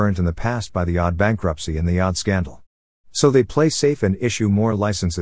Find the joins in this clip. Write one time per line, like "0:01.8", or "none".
none